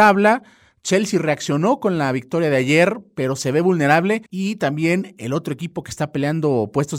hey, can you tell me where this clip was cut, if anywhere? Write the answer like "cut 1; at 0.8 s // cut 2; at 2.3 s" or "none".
cut 1; at 4.3 s